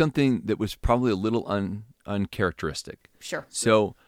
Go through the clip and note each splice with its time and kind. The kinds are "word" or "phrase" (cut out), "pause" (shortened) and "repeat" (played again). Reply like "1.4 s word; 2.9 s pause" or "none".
none